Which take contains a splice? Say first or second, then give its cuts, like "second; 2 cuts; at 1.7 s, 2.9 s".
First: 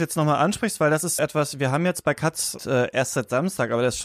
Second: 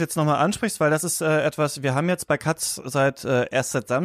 first; 2 cuts; at 1.2 s, 2.6 s